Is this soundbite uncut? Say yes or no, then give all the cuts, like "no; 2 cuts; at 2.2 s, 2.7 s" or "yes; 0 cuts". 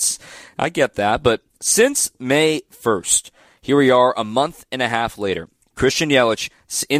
yes; 0 cuts